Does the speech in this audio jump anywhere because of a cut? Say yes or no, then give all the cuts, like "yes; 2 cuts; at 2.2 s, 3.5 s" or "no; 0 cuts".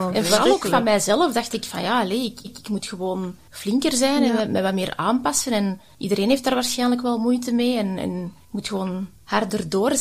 yes; 1 cut; at 2.4 s